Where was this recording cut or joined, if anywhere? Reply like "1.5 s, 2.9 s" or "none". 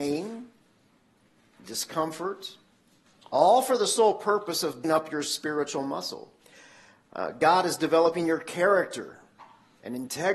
4.8 s